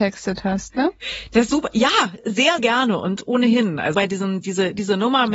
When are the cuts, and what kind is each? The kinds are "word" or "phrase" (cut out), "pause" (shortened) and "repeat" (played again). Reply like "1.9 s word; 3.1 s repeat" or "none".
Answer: 1.5 s word; 2.2 s word; 2.6 s word; 3.9 s word